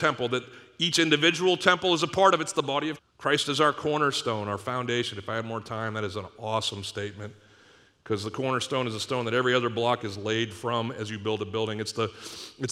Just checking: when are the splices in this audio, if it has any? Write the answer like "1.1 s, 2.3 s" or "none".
3.0 s